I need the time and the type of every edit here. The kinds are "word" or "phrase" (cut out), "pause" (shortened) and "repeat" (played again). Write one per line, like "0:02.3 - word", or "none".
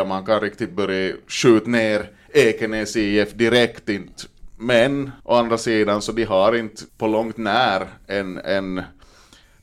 0:05.2 - pause
0:06.9 - pause